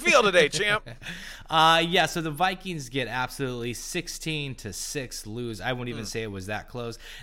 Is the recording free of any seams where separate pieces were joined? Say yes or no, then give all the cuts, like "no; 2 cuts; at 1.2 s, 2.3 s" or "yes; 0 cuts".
yes; 0 cuts